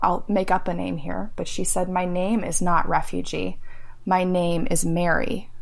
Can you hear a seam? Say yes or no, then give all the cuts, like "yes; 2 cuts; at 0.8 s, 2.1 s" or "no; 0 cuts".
no; 0 cuts